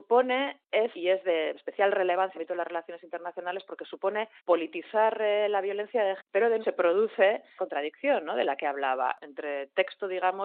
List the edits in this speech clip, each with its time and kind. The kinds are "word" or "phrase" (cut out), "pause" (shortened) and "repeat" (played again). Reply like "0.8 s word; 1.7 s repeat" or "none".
0.9 s word; 1.5 s word; 2.3 s phrase; 4.4 s pause; 6.2 s word; 6.6 s word; 7.6 s word